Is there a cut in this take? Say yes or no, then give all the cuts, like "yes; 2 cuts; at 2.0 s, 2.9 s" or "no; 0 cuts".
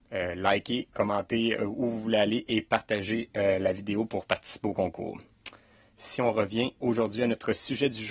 no; 0 cuts